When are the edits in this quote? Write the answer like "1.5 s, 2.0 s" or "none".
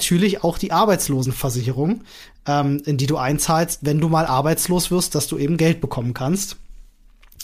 none

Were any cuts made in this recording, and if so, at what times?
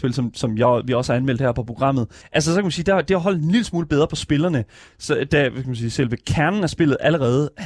2.2 s

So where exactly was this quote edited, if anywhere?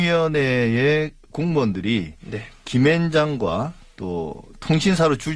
none

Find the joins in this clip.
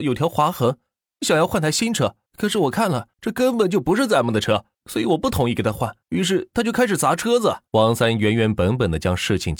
2.3 s, 3.1 s, 4.7 s, 6.0 s, 7.7 s

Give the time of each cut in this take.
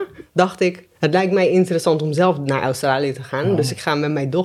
0.9 s

